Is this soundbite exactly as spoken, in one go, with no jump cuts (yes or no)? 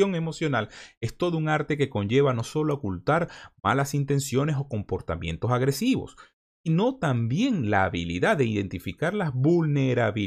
yes